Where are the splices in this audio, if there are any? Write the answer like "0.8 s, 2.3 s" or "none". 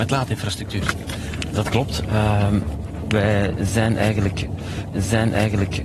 4.9 s